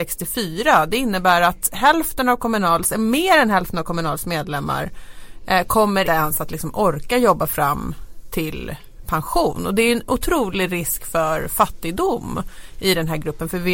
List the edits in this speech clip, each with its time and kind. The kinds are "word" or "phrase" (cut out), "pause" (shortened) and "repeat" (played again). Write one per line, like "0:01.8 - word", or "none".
0:06.0 - word